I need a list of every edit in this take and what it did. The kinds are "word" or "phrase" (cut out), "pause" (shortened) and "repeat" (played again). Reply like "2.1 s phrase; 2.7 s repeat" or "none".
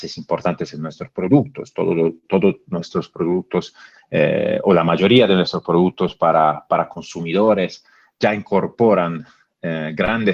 none